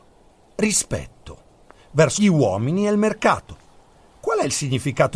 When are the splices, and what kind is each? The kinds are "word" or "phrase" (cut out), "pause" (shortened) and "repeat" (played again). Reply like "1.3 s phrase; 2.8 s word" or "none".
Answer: 2.2 s phrase